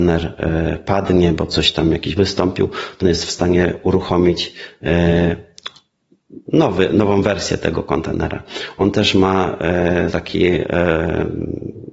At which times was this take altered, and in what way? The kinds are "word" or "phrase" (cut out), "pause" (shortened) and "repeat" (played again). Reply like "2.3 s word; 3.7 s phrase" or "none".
2.2 s word; 3.0 s word; 10.1 s word